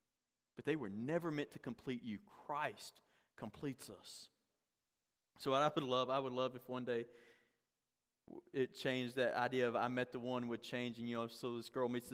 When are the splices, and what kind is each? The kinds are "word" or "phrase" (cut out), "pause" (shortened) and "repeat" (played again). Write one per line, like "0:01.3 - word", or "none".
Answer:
none